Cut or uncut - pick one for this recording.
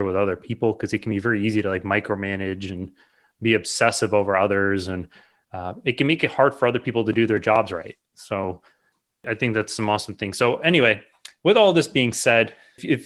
uncut